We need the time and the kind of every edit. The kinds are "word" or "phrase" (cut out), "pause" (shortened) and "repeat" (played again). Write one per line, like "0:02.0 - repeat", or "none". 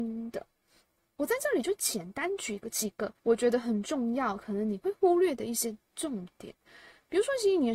0:03.2 - pause